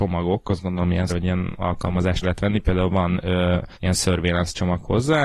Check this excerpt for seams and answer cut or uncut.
cut